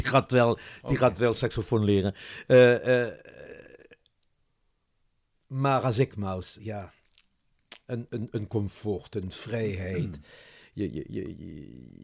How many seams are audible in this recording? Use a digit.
3